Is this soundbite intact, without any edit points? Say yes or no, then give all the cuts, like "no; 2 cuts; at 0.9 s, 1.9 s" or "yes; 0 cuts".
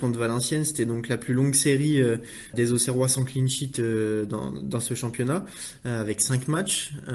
no; 1 cut; at 2.5 s